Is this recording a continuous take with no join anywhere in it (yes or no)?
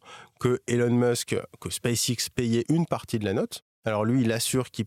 yes